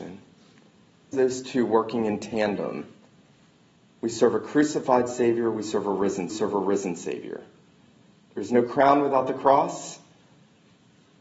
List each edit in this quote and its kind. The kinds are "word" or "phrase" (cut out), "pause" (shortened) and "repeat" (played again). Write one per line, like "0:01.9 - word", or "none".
0:01.1 - word
0:06.3 - repeat